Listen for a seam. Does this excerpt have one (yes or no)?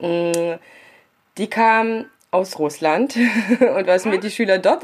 no